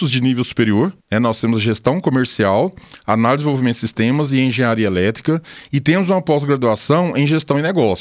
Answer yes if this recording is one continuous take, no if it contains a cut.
no